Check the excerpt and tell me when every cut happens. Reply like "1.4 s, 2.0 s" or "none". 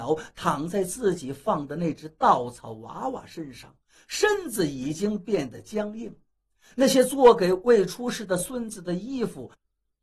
none